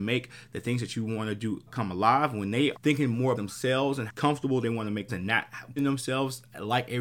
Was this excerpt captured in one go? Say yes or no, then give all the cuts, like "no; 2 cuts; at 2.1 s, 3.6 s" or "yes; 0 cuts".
no; 6 cuts; at 1.7 s, 2.7 s, 3.3 s, 4.1 s, 5.1 s, 5.8 s